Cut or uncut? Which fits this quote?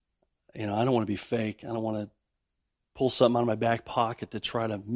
uncut